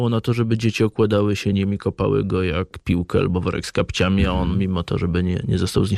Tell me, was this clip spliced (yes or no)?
no